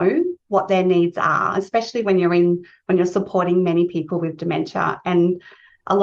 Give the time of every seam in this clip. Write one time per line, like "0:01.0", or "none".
none